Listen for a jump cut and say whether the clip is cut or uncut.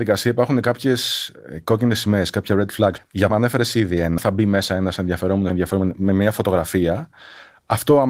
cut